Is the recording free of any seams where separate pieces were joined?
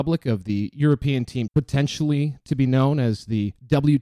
no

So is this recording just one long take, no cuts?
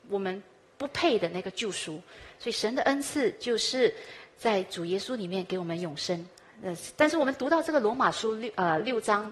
yes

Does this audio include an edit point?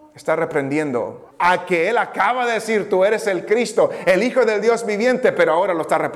yes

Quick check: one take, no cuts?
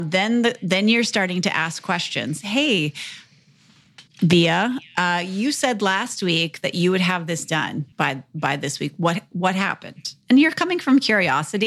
no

